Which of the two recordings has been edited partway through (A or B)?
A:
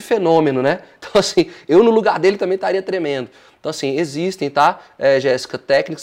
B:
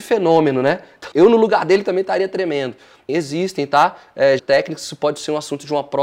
B